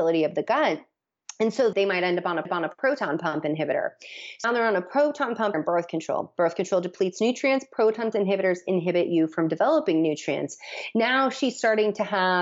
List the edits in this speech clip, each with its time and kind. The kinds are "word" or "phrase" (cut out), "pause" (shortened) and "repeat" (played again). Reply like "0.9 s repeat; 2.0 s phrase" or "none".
1.7 s word; 2.4 s repeat; 4.4 s word; 5.5 s word; 8.1 s word